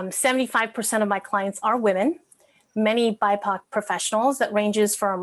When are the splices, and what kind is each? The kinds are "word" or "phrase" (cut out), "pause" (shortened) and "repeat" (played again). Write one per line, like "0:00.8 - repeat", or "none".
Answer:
none